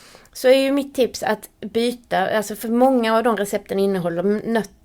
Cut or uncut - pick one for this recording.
uncut